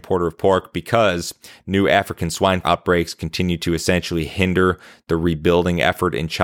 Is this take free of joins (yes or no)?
no